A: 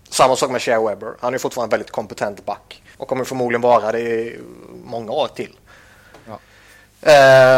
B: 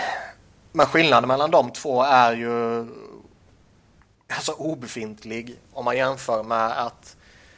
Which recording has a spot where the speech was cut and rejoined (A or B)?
A